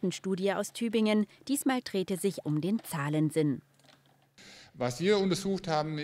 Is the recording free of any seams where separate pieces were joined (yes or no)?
no